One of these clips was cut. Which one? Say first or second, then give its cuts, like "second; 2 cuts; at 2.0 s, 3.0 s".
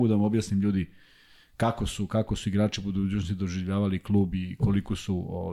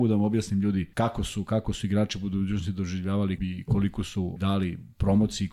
second; 3 cuts; at 0.9 s, 3.4 s, 4.4 s